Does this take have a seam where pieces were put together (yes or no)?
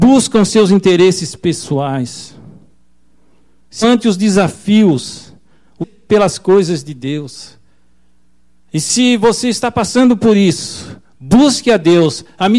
yes